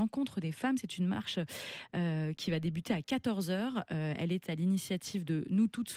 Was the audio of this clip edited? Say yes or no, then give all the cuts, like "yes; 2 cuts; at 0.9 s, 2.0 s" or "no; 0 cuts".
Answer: no; 0 cuts